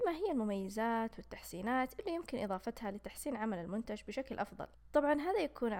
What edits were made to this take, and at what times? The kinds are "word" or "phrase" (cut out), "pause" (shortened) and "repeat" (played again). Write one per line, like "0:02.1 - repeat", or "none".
none